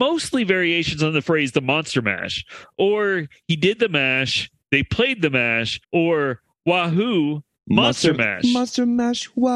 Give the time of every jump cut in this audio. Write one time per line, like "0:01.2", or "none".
0:05.8